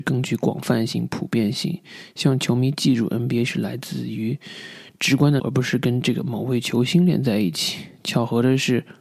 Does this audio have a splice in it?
yes; 1 cut; at 5.4 s

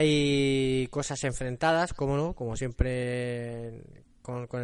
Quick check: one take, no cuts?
yes; 0 cuts

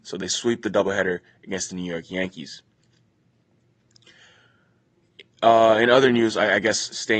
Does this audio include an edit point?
no; 0 cuts

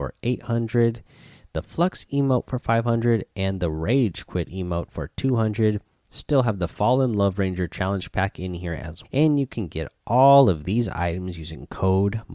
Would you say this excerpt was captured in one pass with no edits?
no; 1 cut; at 9.0 s

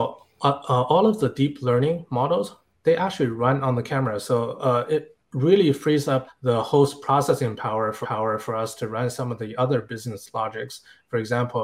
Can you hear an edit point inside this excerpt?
yes; 3 cuts; at 5.2 s, 6.3 s, 8.0 s

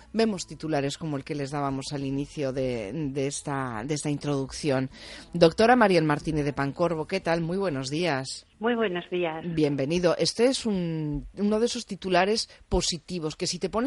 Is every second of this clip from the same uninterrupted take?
no; 1 cut; at 8.5 s

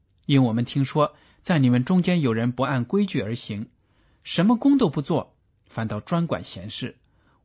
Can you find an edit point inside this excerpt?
no; 0 cuts

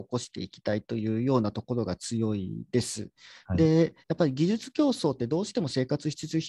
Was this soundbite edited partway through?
yes; 1 cut; at 4.0 s

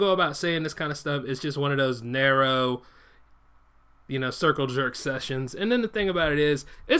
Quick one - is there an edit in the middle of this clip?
no; 0 cuts

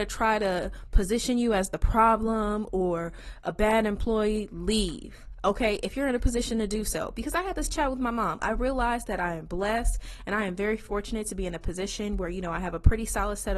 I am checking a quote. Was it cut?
no; 0 cuts

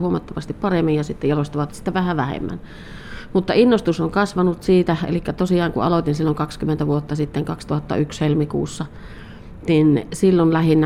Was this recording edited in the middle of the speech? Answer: yes; 1 cut; at 1.7 s

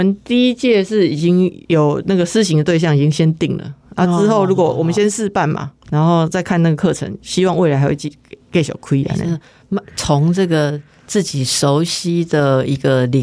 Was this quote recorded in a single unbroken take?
no; 2 cuts; at 1.6 s, 5.8 s

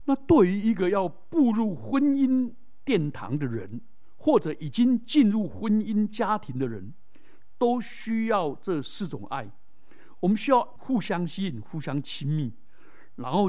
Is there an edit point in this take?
yes; 1 cut; at 10.8 s

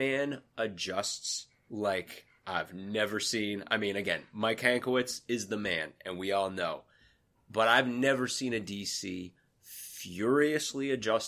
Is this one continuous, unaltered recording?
yes; 0 cuts

